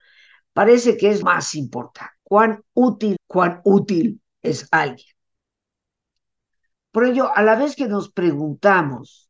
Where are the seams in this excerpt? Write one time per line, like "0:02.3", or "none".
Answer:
0:01.2
0:02.2
0:03.2